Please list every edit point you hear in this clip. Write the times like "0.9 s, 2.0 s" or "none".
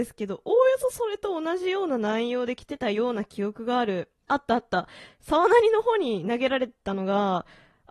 4.2 s

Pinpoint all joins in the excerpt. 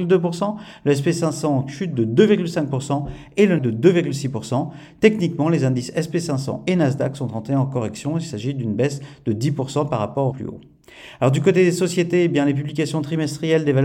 3.6 s, 10.3 s

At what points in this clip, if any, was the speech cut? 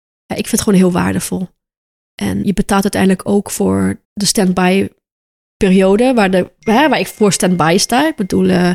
2.4 s, 4.0 s

